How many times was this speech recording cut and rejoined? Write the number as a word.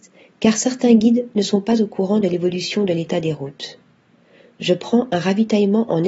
zero